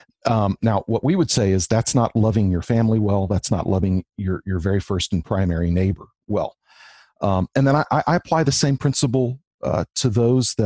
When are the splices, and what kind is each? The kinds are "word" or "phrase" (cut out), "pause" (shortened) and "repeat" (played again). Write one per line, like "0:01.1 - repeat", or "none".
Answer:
none